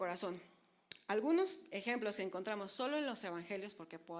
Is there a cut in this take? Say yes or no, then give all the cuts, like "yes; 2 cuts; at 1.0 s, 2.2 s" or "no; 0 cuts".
no; 0 cuts